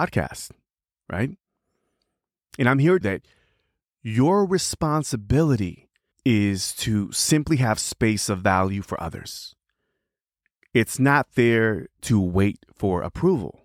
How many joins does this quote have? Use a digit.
2